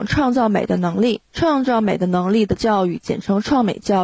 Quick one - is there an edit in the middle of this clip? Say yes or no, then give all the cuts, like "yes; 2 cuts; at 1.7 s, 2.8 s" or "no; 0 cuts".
yes; 1 cut; at 1.3 s